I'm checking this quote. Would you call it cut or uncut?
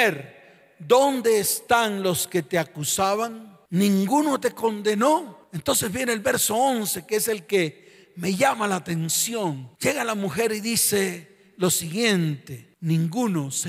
uncut